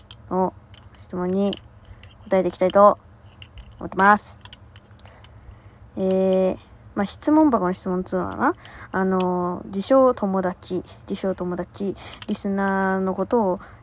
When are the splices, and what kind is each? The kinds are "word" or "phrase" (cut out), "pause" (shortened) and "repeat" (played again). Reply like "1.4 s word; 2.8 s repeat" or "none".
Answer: 11.0 s pause